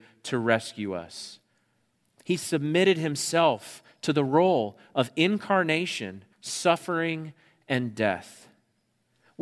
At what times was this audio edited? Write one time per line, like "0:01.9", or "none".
0:06.3